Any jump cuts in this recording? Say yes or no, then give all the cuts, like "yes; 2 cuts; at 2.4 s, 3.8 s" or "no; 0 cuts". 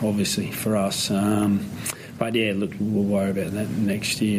yes; 1 cut; at 2.8 s